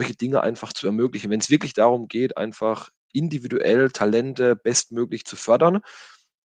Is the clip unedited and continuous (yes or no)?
yes